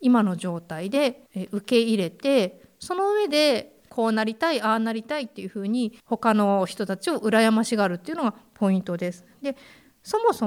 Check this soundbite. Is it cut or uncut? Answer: cut